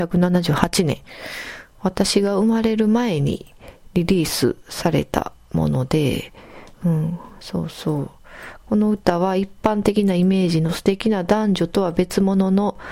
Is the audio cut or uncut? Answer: cut